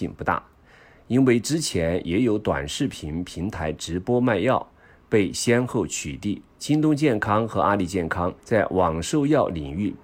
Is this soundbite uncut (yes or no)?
no